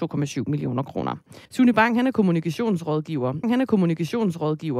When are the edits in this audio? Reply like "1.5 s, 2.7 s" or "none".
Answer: 1.5 s, 3.4 s